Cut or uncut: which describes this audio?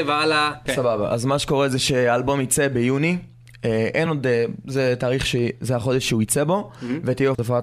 uncut